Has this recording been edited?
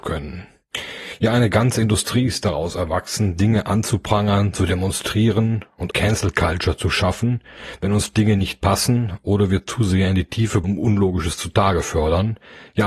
yes; 2 cuts; at 5.9 s, 10.6 s

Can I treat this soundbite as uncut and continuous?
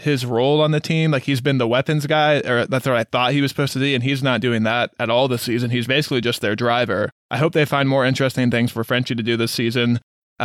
yes; 0 cuts

